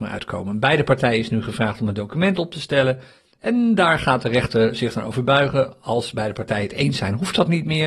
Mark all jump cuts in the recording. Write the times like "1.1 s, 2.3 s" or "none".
none